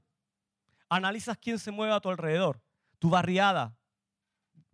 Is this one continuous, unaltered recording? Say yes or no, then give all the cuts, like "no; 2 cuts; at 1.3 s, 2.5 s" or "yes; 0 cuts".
yes; 0 cuts